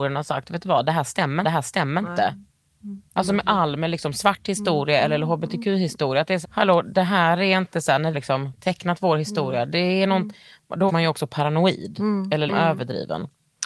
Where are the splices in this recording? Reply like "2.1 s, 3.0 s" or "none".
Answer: 1.4 s, 3.1 s, 6.4 s, 8.1 s, 10.9 s, 12.5 s